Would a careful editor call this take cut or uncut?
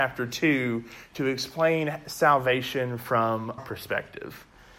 cut